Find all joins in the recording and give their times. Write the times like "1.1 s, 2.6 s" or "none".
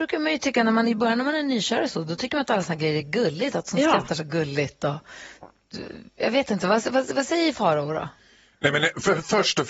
none